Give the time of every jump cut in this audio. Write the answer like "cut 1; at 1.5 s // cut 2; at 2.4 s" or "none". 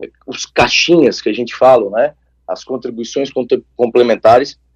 none